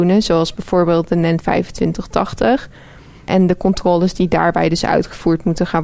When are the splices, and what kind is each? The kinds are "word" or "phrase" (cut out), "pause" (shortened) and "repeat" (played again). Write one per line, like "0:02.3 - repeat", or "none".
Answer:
none